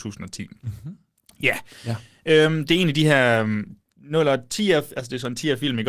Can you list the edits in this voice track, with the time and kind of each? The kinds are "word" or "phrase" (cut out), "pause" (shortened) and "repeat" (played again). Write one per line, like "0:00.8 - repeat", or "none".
none